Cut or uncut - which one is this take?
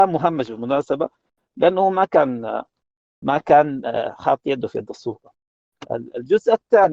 uncut